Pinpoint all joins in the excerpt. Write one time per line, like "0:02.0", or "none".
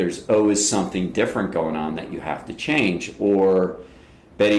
none